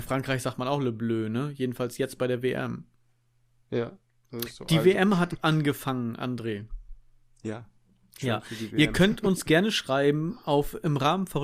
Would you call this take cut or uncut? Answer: uncut